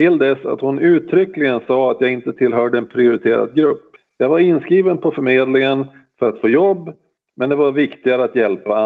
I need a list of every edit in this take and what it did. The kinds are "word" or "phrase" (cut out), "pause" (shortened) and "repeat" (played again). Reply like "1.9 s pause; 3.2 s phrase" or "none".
none